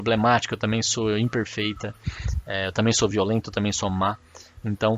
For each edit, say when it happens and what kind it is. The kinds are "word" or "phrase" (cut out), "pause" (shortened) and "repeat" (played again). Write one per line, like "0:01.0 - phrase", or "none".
none